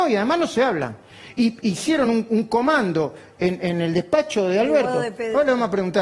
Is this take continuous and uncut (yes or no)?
yes